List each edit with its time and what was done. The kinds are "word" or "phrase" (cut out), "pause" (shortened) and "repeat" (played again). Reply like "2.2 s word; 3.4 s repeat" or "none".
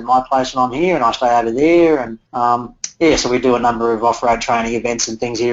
2.3 s pause